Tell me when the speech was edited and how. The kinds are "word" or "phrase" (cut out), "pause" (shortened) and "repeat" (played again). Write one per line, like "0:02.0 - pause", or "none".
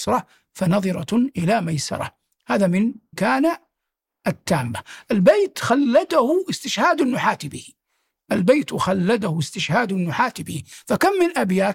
0:03.1 - word